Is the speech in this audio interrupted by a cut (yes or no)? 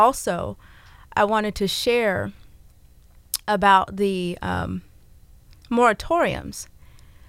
no